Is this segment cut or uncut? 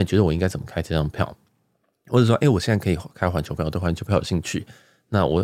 uncut